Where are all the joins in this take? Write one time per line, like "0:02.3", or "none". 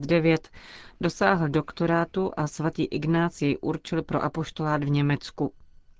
none